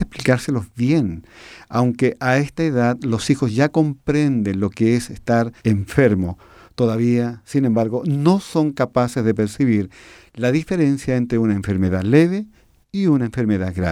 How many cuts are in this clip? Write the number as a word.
one